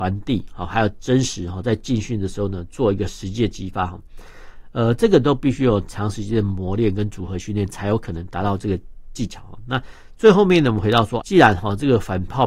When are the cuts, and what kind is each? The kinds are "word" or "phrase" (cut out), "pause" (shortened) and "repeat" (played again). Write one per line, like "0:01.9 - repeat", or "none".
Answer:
0:11.2 - word